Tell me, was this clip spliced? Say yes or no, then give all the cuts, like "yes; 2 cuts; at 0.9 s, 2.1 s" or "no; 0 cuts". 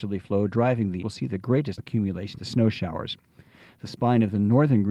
yes; 3 cuts; at 1.0 s, 1.8 s, 2.4 s